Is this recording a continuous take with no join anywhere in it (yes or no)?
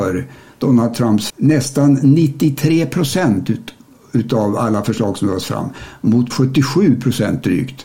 no